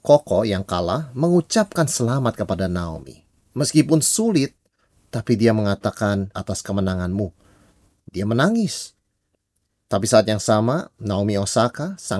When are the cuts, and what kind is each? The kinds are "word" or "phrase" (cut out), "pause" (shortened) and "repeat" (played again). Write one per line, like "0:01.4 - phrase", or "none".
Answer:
0:06.3 - word